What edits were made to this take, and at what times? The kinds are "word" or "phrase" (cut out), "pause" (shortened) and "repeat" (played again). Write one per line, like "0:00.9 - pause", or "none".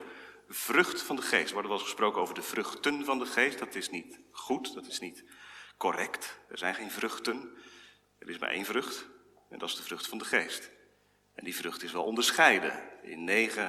none